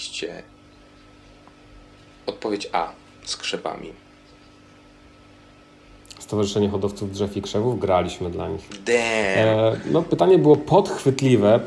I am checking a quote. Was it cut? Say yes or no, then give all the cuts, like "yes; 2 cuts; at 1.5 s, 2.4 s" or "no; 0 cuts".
no; 0 cuts